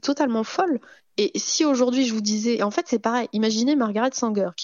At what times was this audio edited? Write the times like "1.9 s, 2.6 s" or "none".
2.6 s